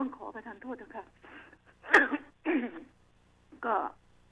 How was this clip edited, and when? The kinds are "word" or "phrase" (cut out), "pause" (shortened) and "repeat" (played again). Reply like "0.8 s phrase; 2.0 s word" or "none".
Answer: none